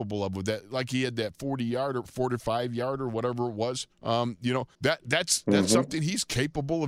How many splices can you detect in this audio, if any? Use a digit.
2